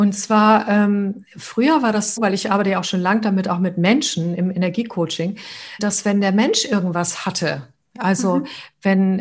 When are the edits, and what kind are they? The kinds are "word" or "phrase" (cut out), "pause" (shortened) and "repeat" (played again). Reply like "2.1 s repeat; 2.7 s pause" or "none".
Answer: 1.3 s pause; 2.2 s word; 5.8 s word